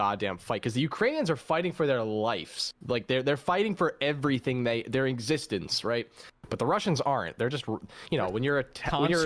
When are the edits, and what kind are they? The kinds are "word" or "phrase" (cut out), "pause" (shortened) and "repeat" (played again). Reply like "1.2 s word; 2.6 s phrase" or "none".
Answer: none